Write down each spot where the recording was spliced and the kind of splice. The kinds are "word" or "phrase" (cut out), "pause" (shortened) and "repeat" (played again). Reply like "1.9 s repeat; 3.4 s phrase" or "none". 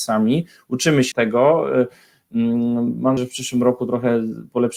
1.1 s word; 3.2 s word